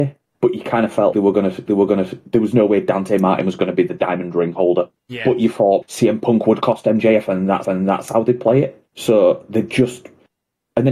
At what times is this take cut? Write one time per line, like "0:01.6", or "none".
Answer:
0:01.1
0:01.7
0:05.0
0:05.8
0:07.6
0:08.9